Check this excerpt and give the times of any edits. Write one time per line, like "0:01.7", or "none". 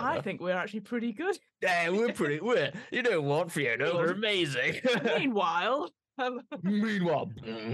0:03.9